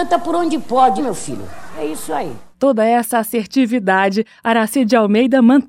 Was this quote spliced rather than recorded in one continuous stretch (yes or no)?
yes